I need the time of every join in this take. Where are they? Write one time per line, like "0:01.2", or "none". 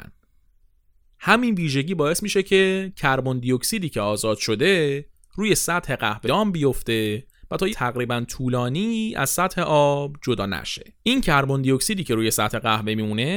0:06.2
0:07.7
0:11.0